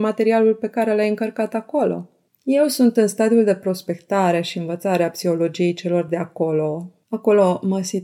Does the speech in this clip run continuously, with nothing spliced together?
yes; 0 cuts

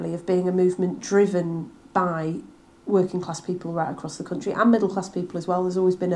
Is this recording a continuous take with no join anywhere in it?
yes; 0 cuts

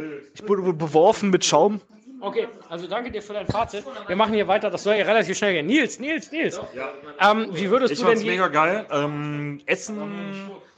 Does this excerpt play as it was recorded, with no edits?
yes; 0 cuts

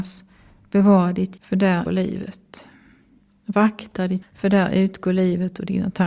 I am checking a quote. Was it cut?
yes; 3 cuts; at 1.4 s, 1.9 s, 4.2 s

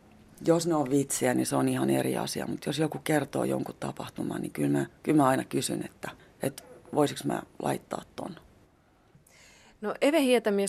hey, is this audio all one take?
no; 2 cuts; at 5.0 s, 6.2 s

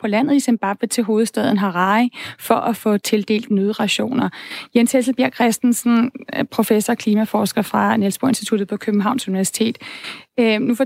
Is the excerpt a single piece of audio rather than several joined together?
yes; 0 cuts

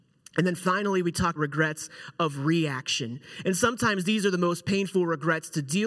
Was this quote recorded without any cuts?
no; 1 cut; at 1.4 s

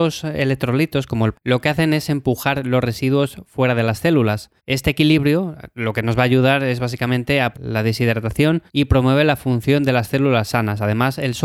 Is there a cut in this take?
yes; 4 cuts; at 1.3 s, 4.6 s, 7.5 s, 8.7 s

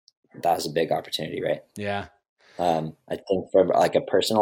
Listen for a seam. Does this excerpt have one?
no; 0 cuts

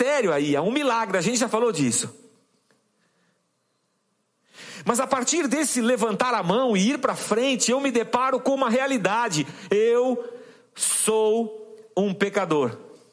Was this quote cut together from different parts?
no; 0 cuts

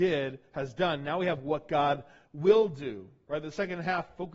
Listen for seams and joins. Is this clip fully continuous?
yes; 0 cuts

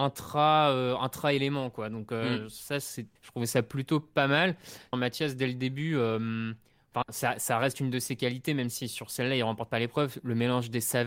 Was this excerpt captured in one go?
no; 2 cuts; at 3.2 s, 4.9 s

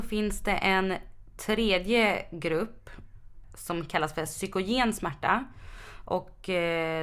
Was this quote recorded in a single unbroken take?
yes; 0 cuts

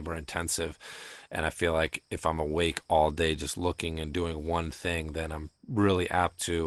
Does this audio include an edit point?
no; 0 cuts

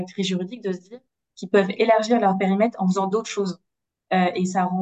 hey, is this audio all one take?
yes; 0 cuts

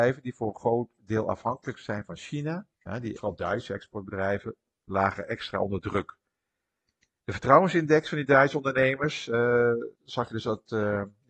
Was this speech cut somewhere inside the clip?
yes; 3 cuts; at 2.7 s, 3.2 s, 9.9 s

